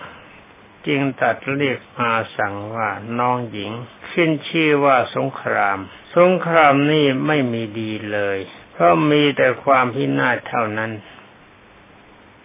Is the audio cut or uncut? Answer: cut